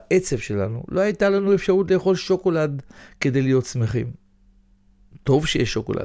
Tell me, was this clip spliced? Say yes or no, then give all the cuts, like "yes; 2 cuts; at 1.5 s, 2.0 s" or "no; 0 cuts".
no; 0 cuts